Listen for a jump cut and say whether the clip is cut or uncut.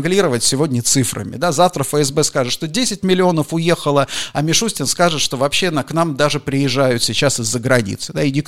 uncut